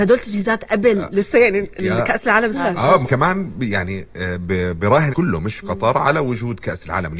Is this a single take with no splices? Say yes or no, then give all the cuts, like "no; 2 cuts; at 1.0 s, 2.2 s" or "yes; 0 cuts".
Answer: no; 4 cuts; at 2.5 s, 3.0 s, 5.1 s, 5.6 s